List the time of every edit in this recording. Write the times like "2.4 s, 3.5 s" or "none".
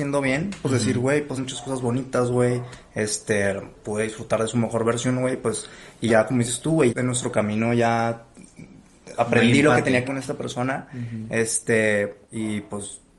1.4 s, 6.1 s, 6.9 s, 9.2 s, 10.0 s, 12.2 s